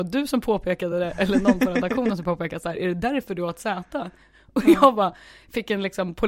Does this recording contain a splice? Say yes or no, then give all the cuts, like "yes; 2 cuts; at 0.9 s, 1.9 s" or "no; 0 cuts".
no; 0 cuts